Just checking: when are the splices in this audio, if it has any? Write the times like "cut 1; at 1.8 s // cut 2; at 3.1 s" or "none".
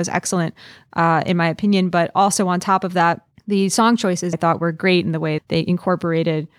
cut 1; at 3.3 s // cut 2; at 4.3 s // cut 3; at 5.4 s